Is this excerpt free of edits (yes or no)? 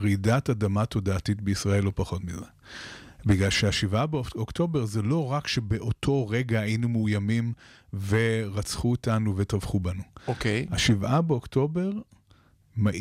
yes